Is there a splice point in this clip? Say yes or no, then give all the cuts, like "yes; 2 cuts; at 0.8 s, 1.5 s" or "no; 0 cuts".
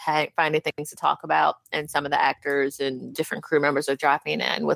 no; 0 cuts